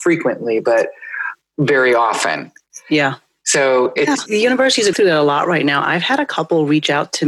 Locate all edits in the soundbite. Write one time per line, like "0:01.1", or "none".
0:01.4
0:04.3
0:04.9